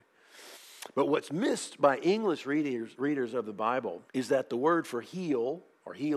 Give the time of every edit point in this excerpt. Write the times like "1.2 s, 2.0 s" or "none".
4.1 s